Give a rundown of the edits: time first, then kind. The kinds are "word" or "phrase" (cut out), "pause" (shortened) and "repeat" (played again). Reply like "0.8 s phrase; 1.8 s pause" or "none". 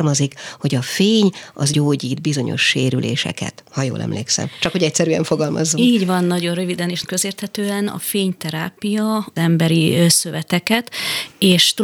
1.7 s word; 7.0 s word; 9.4 s phrase